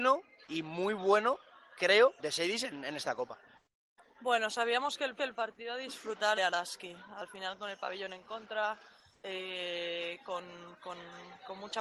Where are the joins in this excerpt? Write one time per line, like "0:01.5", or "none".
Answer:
0:02.2
0:05.2
0:06.4